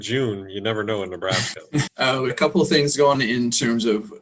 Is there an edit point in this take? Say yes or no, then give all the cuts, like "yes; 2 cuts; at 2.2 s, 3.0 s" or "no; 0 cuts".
yes; 3 cuts; at 1.9 s, 2.3 s, 3.1 s